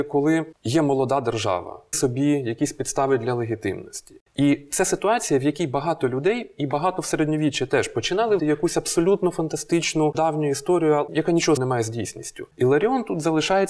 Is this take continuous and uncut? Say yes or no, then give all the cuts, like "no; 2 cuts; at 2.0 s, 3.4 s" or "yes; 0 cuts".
no; 4 cuts; at 1.9 s, 8.4 s, 10.1 s, 11.6 s